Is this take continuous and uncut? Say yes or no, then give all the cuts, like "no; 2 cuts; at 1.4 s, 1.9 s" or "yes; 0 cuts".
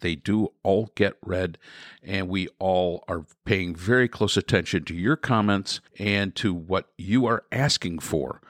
no; 1 cut; at 5.9 s